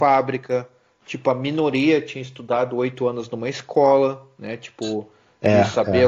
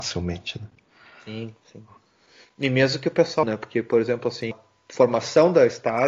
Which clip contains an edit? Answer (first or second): second